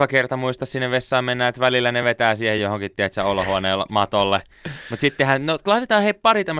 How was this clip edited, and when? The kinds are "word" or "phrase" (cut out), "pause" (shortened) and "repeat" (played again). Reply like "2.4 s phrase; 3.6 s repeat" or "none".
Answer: none